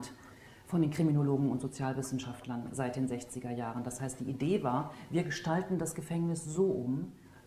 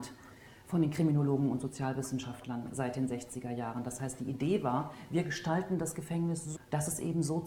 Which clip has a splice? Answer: second; 1 cut; at 6.6 s

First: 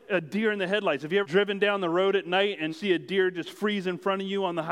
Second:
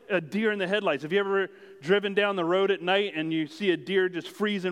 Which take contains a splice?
first; 2 cuts; at 1.2 s, 2.7 s

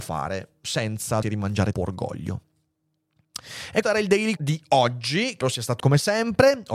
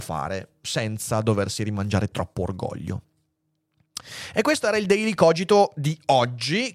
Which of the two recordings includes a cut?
first; 6 cuts; at 1.2 s, 1.7 s, 3.8 s, 4.4 s, 5.4 s, 5.8 s

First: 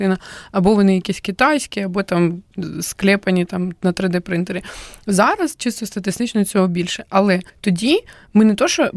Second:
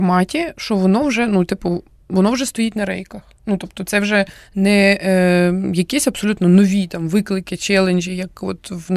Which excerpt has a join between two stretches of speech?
first; 1 cut; at 7.5 s

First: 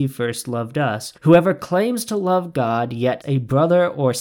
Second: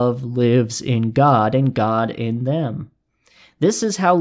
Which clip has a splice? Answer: first; 2 cuts; at 1.2 s, 3.2 s

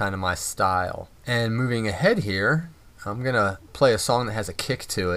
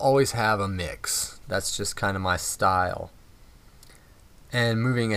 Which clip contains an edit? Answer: first; 2 cuts; at 1.2 s, 2.9 s

